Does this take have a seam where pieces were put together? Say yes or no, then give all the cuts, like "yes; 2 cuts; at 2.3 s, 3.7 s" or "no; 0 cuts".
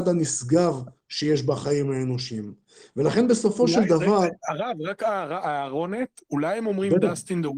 no; 0 cuts